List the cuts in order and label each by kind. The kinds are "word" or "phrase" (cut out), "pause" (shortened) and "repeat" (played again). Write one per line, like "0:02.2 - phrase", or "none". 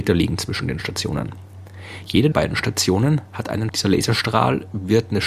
0:02.3 - word
0:03.7 - phrase